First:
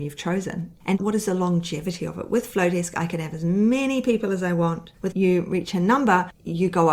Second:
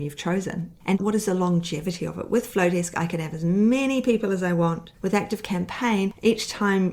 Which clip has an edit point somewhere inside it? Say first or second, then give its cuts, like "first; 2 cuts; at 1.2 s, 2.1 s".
first; 1 cut; at 5.1 s